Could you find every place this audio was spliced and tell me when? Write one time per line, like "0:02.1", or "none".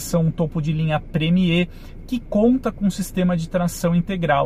none